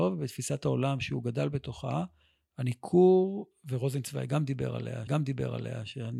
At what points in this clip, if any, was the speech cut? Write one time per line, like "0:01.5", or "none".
0:05.1